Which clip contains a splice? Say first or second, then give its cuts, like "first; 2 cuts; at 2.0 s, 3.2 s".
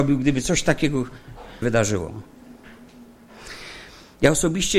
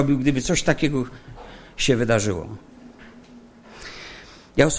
first; 1 cut; at 1.6 s